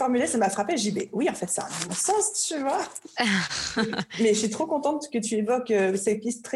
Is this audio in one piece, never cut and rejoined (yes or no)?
yes